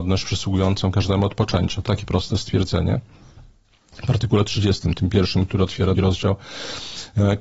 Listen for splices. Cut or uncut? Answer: cut